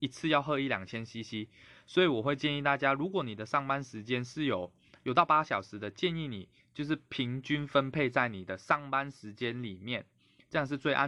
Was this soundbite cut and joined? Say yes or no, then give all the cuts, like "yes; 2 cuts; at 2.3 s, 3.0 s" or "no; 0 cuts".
no; 0 cuts